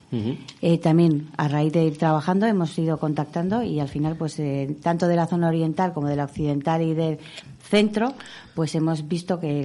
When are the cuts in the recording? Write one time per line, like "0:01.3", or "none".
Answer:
none